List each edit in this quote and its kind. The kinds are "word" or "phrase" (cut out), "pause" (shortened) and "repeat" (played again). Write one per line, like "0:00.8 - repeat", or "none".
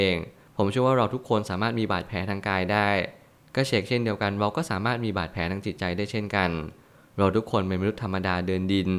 none